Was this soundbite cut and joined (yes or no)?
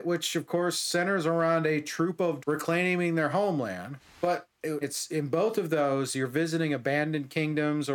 yes